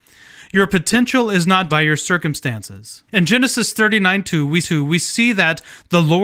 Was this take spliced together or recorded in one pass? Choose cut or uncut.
cut